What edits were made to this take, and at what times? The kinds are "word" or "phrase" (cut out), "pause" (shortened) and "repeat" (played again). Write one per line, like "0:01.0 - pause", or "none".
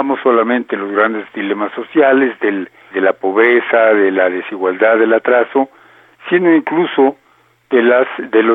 0:02.9 - word